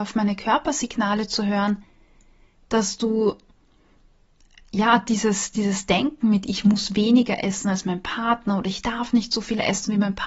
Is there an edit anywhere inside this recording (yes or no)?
no